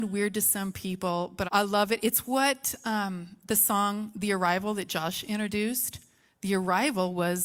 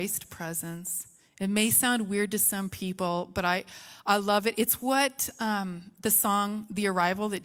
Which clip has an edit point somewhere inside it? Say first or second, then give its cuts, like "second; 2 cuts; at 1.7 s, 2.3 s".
first; 1 cut; at 1.4 s